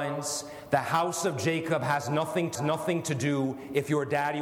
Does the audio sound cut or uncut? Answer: cut